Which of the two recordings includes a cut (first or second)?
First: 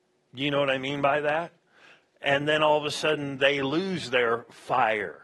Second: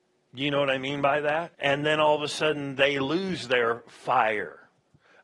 second